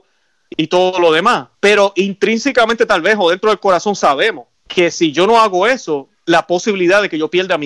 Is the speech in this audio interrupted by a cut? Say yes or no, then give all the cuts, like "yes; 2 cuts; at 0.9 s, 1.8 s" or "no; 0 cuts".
yes; 2 cuts; at 1.5 s, 4.5 s